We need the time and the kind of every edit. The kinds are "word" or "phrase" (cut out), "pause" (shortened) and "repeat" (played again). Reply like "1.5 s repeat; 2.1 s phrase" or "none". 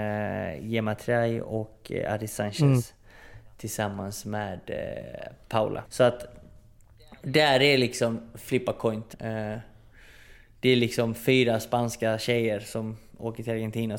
5.9 s pause; 9.1 s pause